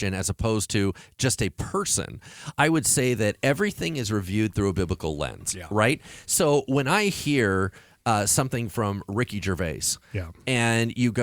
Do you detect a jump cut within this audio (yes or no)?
no